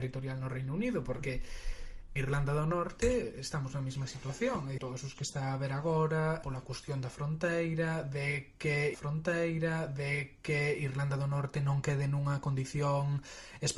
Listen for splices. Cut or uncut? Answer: cut